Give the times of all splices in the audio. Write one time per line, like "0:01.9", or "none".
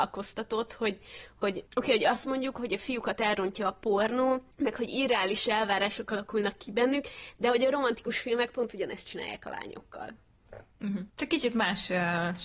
0:01.7
0:04.5
0:11.1